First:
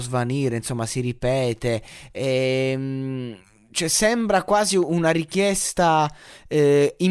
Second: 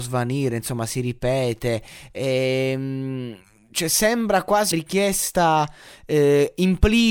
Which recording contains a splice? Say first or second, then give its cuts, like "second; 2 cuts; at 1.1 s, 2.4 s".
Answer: second; 1 cut; at 4.7 s